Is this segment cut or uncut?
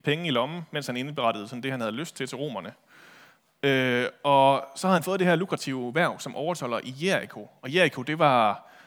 uncut